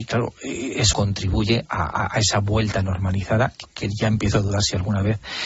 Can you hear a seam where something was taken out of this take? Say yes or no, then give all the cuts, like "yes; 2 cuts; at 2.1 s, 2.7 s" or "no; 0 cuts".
yes; 2 cuts; at 0.9 s, 3.6 s